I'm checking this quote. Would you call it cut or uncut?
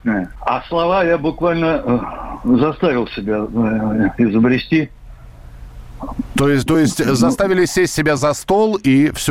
uncut